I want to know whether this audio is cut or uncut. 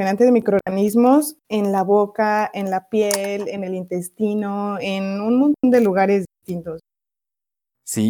cut